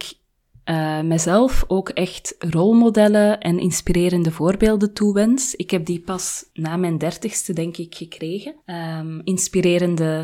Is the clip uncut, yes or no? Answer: no